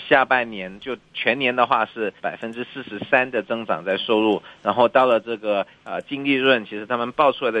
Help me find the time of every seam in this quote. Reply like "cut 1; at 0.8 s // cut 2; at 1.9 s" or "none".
cut 1; at 2.2 s